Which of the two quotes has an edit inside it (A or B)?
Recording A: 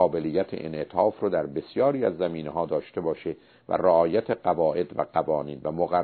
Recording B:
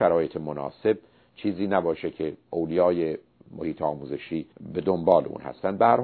B